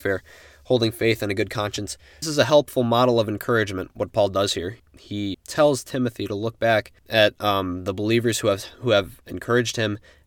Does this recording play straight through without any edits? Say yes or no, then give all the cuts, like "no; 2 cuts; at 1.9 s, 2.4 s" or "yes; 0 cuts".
no; 4 cuts; at 2.2 s, 3.9 s, 4.8 s, 5.3 s